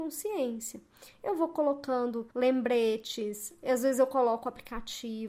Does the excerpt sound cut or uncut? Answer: cut